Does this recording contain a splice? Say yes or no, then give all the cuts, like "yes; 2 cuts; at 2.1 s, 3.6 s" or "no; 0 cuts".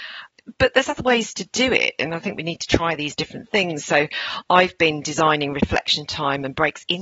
yes; 1 cut; at 3.1 s